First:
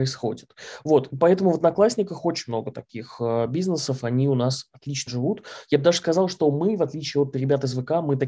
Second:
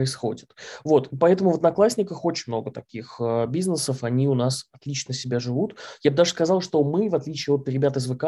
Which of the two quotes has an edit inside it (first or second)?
first